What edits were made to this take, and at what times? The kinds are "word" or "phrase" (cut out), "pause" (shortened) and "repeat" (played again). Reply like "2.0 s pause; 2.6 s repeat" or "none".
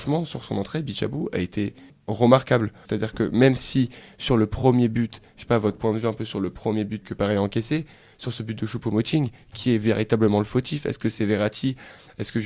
7.0 s word